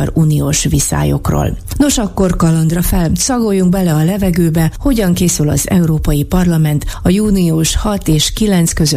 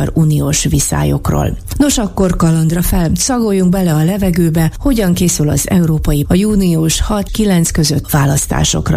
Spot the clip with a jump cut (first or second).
second